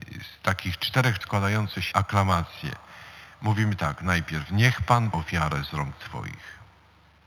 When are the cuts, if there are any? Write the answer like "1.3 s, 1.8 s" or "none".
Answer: 1.2 s, 1.9 s, 5.1 s